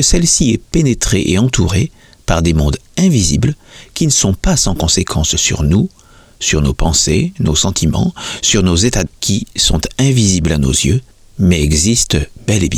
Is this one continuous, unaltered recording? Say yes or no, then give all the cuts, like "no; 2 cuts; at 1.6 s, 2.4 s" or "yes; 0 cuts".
no; 1 cut; at 9.1 s